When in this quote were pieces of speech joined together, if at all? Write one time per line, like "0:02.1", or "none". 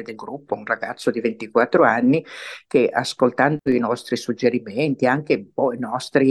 none